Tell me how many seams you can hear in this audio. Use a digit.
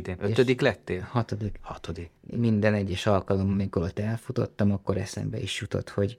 1